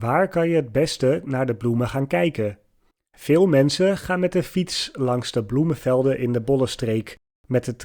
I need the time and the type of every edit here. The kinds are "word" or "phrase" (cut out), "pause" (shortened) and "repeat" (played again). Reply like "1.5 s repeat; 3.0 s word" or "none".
2.9 s pause